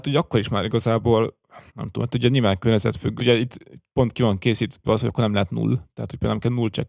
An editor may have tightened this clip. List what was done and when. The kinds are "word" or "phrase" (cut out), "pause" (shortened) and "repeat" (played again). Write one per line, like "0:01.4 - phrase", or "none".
0:01.7 - pause
0:03.2 - phrase
0:04.8 - word